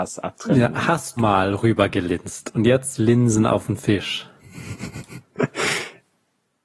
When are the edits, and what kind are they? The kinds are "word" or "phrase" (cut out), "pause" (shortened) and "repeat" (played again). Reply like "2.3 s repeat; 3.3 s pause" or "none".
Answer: 1.2 s word; 3.0 s word